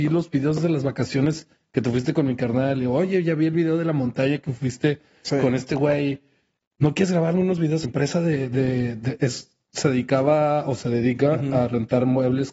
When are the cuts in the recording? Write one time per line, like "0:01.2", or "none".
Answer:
0:07.8